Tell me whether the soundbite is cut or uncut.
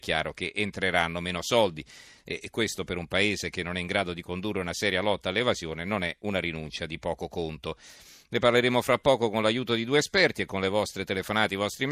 uncut